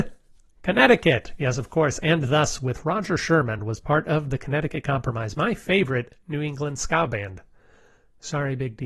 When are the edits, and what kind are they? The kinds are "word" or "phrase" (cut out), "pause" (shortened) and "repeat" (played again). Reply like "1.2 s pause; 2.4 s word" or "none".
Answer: none